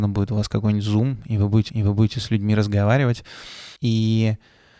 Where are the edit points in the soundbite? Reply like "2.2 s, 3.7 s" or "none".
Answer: 1.7 s, 3.8 s